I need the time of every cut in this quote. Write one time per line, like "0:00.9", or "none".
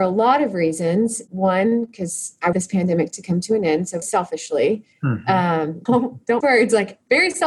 0:02.5
0:04.0
0:05.9
0:06.4